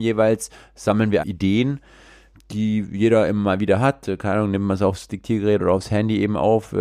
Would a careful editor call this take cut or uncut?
cut